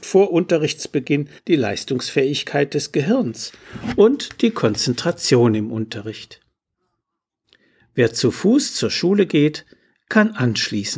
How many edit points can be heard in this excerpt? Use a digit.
1